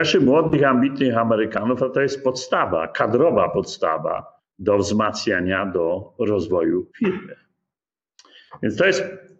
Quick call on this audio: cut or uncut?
cut